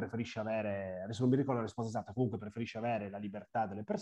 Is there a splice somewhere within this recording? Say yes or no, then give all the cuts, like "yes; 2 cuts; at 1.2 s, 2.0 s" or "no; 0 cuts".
no; 0 cuts